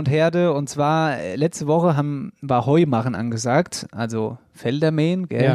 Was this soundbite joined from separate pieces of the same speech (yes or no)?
no